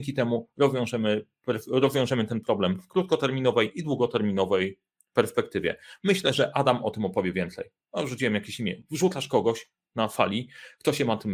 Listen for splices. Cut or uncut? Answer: uncut